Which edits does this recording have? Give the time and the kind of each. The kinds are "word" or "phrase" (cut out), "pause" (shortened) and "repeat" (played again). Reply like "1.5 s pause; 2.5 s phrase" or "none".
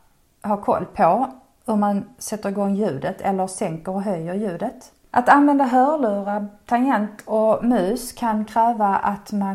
none

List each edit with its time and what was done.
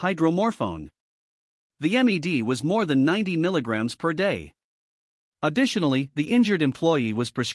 none

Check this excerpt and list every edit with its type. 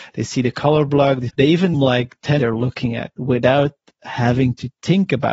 1.3 s phrase; 1.7 s phrase; 2.4 s phrase

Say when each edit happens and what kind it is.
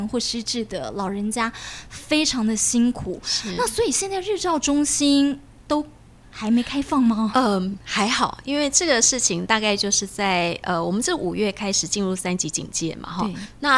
none

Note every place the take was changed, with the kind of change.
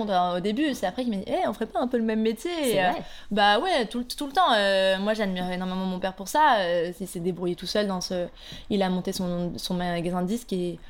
none

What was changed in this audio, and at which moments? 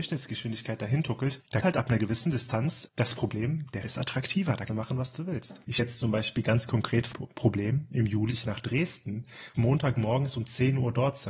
1.6 s word; 2.9 s word; 3.8 s word; 4.7 s word; 5.8 s word; 7.1 s word; 8.3 s word; 9.5 s word

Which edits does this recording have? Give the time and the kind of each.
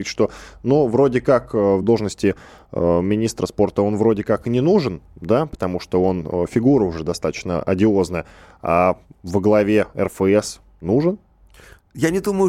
none

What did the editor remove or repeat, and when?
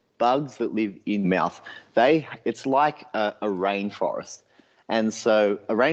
1.2 s phrase

